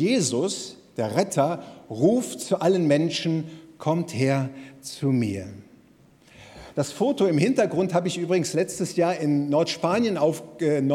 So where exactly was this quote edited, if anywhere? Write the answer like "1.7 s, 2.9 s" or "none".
none